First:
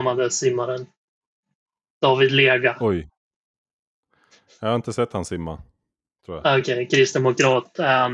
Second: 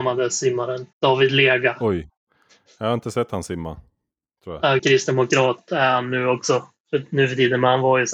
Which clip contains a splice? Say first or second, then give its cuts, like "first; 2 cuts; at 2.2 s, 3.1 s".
second; 3 cuts; at 0.9 s, 2.3 s, 4.8 s